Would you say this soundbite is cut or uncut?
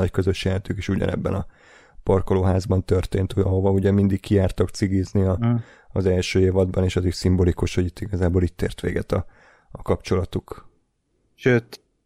uncut